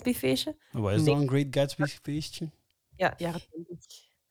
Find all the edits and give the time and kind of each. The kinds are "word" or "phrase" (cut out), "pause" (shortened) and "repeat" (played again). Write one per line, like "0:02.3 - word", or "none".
0:03.2 - word